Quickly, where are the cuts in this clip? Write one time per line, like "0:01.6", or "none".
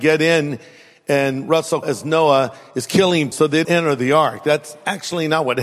0:01.8
0:03.3
0:03.6